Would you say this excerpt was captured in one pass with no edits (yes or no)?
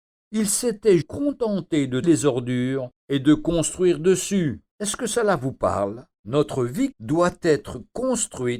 no